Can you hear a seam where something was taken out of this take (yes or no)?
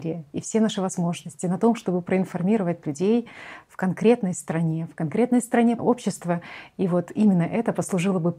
yes